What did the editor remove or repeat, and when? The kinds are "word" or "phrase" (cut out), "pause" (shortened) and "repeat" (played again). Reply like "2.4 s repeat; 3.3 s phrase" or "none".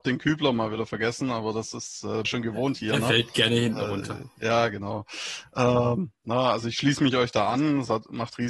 2.2 s phrase